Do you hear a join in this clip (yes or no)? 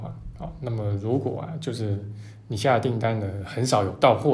no